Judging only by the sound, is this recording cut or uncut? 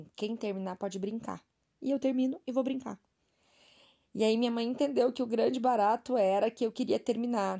uncut